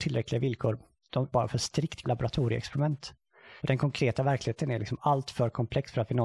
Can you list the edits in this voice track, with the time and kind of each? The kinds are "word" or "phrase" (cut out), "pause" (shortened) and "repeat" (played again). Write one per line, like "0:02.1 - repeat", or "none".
0:01.3 - phrase
0:02.0 - word
0:03.6 - pause